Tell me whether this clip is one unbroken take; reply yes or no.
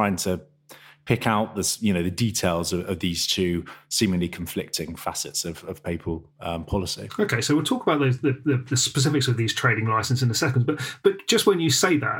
yes